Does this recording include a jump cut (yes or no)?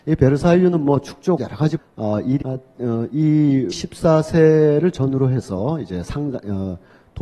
yes